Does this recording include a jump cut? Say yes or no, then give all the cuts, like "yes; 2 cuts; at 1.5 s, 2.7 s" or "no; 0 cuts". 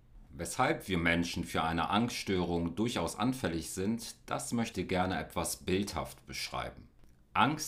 yes; 1 cut; at 4.7 s